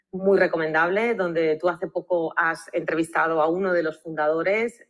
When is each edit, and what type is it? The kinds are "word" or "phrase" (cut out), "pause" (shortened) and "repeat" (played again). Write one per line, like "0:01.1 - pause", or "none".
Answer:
none